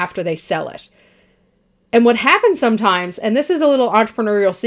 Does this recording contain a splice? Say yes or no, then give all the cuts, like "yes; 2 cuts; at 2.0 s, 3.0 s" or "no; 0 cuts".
no; 0 cuts